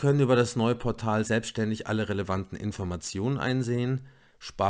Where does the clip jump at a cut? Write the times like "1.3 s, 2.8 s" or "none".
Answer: none

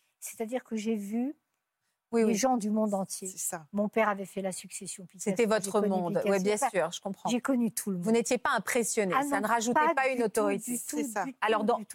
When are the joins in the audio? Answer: none

